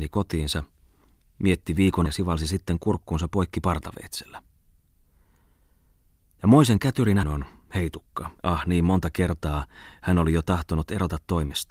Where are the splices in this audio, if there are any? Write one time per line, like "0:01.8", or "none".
0:02.0
0:07.2
0:08.4